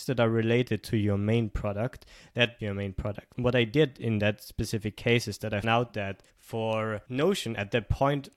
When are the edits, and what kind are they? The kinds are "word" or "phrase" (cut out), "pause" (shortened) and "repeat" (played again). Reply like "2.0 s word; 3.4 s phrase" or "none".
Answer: 2.6 s phrase; 5.6 s word; 6.3 s pause